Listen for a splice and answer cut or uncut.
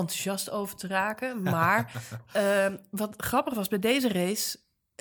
uncut